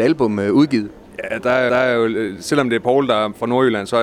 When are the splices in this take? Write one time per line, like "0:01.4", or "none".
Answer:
0:01.7